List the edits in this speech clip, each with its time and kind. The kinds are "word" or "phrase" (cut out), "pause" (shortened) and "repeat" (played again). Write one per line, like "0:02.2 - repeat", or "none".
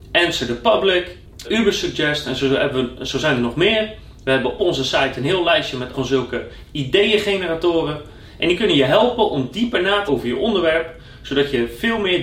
0:01.4 - word
0:04.6 - word
0:05.9 - word
0:10.1 - word